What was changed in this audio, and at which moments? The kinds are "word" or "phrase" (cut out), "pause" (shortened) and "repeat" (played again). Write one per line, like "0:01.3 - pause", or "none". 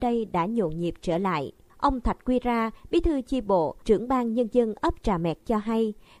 0:01.7 - pause
0:03.8 - pause

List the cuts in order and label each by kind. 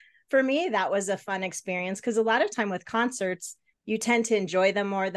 0:03.7 - pause

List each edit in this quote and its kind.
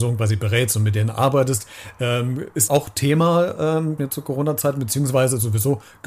0:02.7 - word
0:04.0 - phrase

